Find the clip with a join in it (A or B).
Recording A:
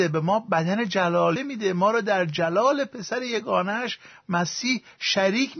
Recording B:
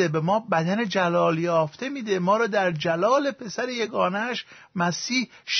A